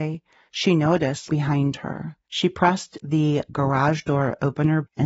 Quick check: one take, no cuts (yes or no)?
no